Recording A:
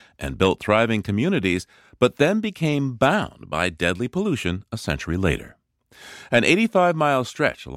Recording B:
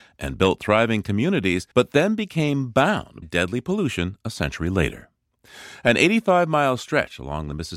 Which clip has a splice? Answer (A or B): B